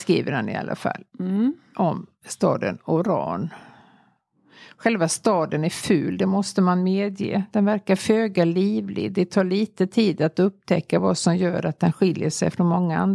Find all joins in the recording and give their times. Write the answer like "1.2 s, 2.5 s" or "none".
none